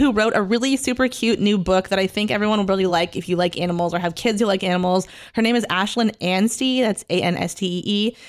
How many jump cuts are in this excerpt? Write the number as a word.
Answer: zero